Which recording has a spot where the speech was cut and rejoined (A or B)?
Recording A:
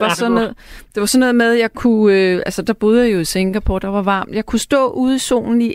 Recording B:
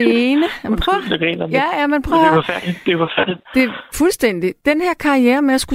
B